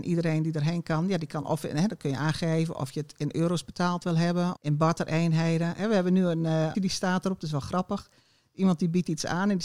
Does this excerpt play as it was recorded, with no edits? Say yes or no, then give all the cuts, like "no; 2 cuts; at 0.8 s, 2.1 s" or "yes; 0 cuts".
no; 2 cuts; at 4.6 s, 6.7 s